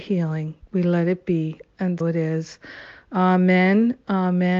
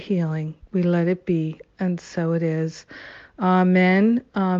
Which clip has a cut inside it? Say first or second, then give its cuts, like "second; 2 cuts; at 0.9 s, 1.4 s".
first; 1 cut; at 2.0 s